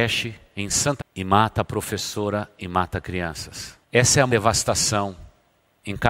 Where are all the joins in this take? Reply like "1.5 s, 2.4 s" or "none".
1.0 s, 3.8 s, 4.3 s